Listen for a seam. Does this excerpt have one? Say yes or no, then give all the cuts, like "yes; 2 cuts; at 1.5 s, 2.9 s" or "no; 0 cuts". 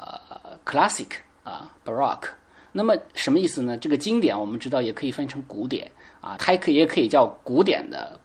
yes; 2 cuts; at 3.1 s, 6.4 s